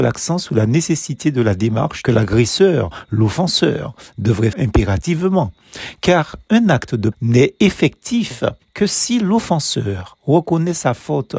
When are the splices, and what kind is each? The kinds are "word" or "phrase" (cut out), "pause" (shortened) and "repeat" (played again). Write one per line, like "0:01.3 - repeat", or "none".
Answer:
0:02.0 - phrase
0:04.5 - word
0:07.1 - word
0:08.6 - pause